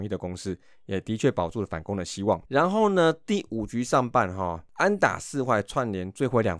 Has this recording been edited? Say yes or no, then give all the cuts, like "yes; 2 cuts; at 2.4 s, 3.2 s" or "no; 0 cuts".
yes; 1 cut; at 2.5 s